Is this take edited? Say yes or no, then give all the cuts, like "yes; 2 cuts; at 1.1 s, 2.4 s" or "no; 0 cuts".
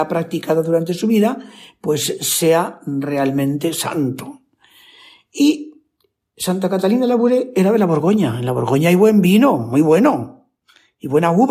no; 0 cuts